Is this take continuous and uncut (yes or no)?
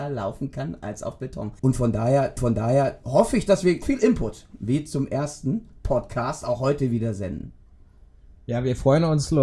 no